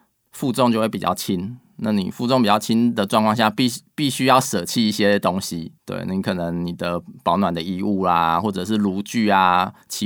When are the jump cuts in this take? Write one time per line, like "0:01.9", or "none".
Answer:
0:05.8